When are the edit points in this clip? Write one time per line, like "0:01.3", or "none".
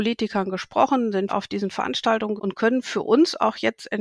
0:01.3
0:02.4